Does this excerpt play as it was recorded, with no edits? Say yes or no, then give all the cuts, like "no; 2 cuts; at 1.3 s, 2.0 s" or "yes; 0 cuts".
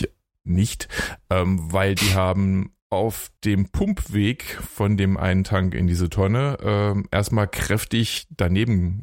yes; 0 cuts